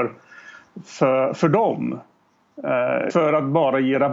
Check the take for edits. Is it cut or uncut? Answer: cut